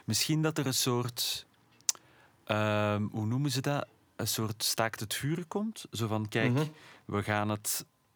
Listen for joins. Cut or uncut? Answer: uncut